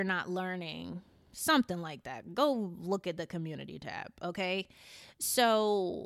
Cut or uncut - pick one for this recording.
uncut